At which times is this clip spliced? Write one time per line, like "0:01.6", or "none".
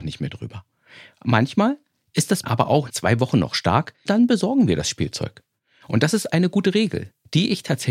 0:02.4
0:02.9
0:04.1